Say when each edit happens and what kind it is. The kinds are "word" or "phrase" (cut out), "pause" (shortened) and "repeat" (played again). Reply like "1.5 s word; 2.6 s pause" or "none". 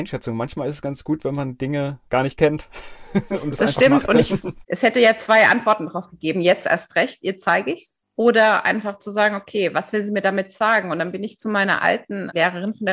2.1 s pause